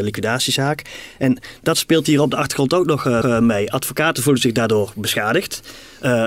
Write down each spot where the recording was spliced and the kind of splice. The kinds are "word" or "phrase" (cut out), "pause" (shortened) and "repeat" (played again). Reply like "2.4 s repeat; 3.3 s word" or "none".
3.2 s repeat

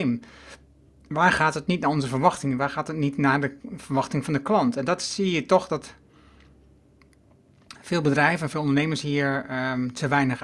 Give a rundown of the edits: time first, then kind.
3.6 s pause

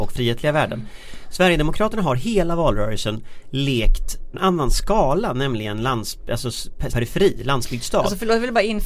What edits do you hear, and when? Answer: 4.3 s word; 6.9 s word

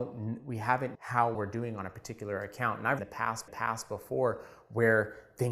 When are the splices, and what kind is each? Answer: 0.9 s word; 1.3 s word; 3.0 s phrase; 3.5 s repeat

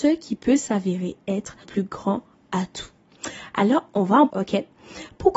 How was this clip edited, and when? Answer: 1.6 s word; 3.9 s word; 4.3 s word

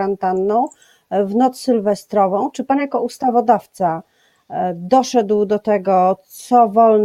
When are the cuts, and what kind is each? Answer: none

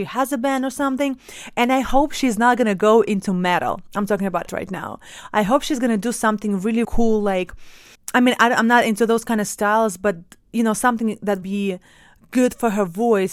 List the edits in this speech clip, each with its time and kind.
4.5 s word; 6.8 s word; 7.9 s word; 11.4 s word

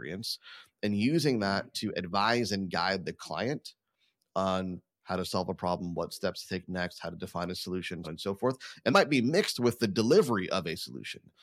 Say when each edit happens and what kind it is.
8.0 s word; 8.9 s word

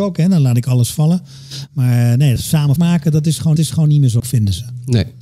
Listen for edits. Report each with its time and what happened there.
2.4 s word; 2.8 s word; 3.6 s repeat; 4.2 s word

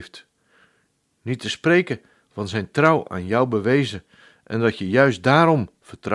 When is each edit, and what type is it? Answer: none

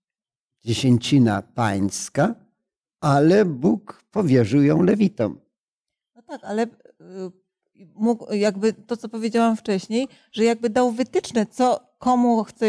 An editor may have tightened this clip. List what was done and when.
none

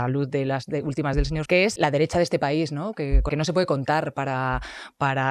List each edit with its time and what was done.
1.1 s word; 1.5 s word; 1.8 s word; 3.3 s word

